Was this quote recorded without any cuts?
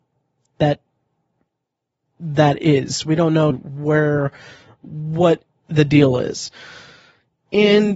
no; 1 cut; at 3.5 s

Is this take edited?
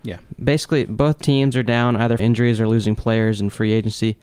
yes; 2 cuts; at 1.2 s, 2.2 s

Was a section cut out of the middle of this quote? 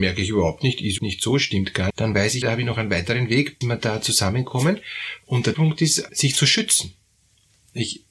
yes; 6 cuts; at 1.0 s, 1.9 s, 2.4 s, 3.6 s, 5.5 s, 6.1 s

